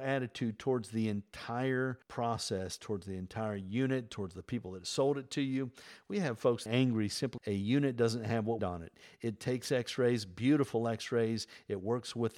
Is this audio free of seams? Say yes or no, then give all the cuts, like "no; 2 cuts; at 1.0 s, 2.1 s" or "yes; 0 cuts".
no; 4 cuts; at 2.0 s, 6.7 s, 7.4 s, 8.6 s